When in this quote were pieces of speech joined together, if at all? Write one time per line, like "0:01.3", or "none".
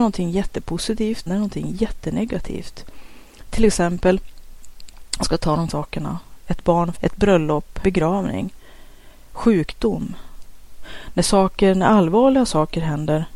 0:01.3
0:05.2
0:05.7
0:07.0
0:07.8